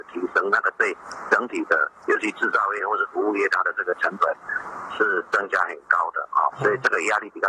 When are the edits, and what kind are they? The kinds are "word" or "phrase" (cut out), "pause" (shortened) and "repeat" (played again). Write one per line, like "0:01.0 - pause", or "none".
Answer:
0:06.5 - word